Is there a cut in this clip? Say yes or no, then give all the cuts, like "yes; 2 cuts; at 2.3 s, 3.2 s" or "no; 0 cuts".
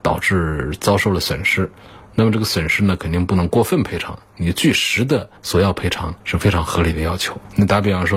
yes; 2 cuts; at 5.4 s, 6.2 s